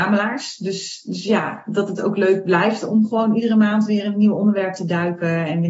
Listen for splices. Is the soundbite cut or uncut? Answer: uncut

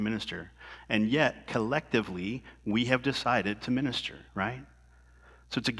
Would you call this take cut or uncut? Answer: cut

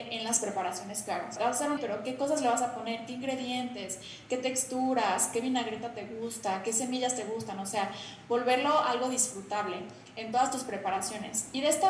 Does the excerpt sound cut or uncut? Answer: cut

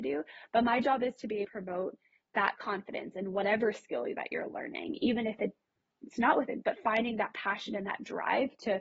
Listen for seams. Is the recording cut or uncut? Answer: cut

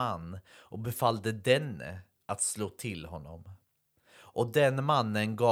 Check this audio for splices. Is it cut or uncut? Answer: uncut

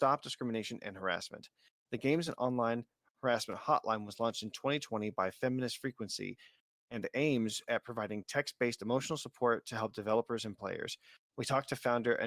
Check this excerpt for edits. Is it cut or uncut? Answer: uncut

